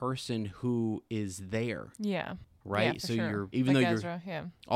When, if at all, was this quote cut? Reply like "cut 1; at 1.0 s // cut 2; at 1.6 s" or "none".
cut 1; at 3.5 s